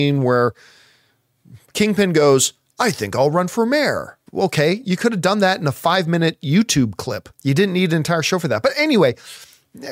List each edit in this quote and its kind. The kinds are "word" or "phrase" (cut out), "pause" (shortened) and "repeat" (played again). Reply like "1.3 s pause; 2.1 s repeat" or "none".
4.3 s pause; 7.3 s pause